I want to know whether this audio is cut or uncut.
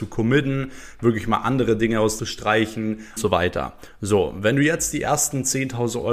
cut